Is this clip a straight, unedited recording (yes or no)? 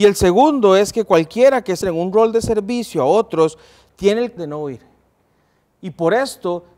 no